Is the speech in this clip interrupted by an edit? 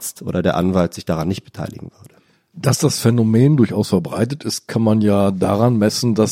no; 0 cuts

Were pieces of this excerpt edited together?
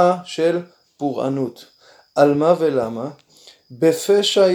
no; 0 cuts

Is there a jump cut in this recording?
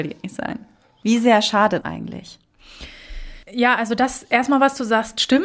yes; 2 cuts; at 1.8 s, 3.4 s

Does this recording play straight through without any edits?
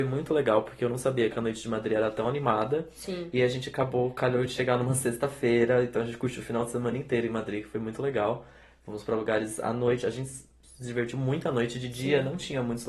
yes; 0 cuts

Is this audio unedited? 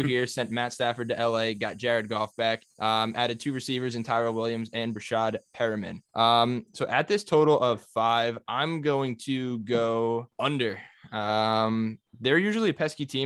no; 4 cuts; at 2.7 s, 6.0 s, 10.3 s, 12.1 s

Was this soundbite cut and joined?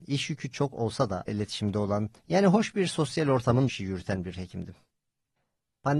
yes; 3 cuts; at 1.3 s, 2.2 s, 3.7 s

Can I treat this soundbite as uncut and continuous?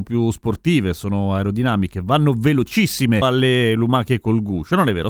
no; 1 cut; at 3.2 s

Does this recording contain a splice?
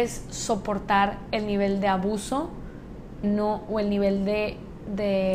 yes; 1 cut; at 3.2 s

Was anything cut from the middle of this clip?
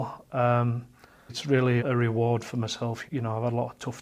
yes; 3 cuts; at 1.3 s, 1.8 s, 3.1 s

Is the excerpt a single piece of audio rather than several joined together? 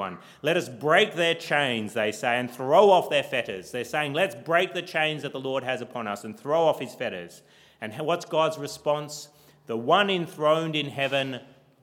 yes; 0 cuts

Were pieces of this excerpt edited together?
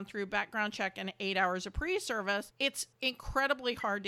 no; 0 cuts

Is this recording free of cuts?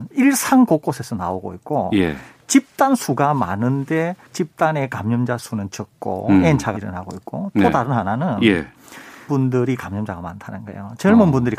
no; 3 cuts; at 4.3 s, 6.7 s, 9.3 s

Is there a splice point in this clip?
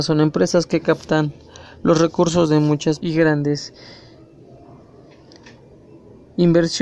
yes; 1 cut; at 3.0 s

